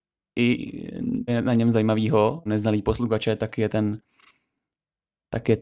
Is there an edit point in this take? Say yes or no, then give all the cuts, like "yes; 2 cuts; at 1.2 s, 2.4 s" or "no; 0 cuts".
yes; 2 cuts; at 1.3 s, 2.5 s